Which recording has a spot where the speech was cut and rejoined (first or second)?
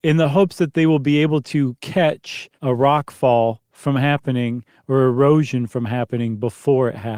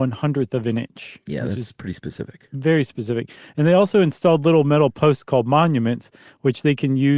first